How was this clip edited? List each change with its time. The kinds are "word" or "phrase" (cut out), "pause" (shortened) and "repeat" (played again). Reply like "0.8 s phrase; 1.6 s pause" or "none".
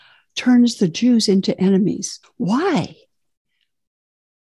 2.2 s pause

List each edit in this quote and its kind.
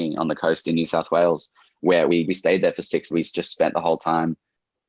2.2 s word; 3.1 s phrase

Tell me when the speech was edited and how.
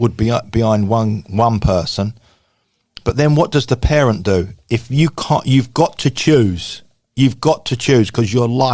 none

